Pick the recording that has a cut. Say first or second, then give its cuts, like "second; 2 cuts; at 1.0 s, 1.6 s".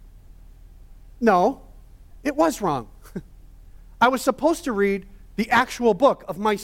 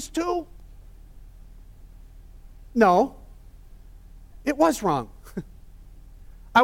first; 2 cuts; at 2.1 s, 3.3 s